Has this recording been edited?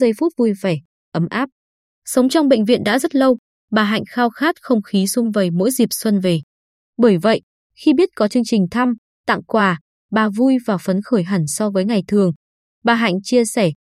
no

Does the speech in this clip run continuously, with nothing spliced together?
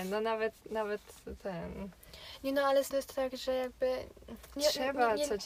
no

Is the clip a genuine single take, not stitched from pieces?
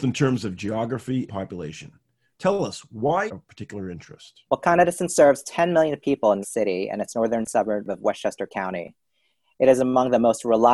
no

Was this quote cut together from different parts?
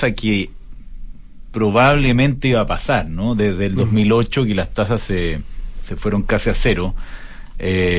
no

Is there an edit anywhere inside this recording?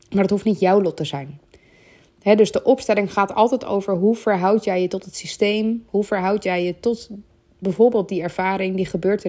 no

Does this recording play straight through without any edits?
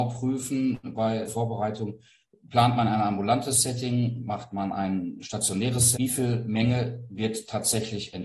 no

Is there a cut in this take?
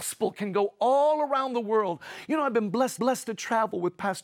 yes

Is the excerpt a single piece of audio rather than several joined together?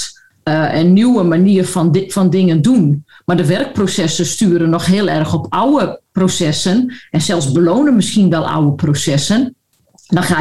yes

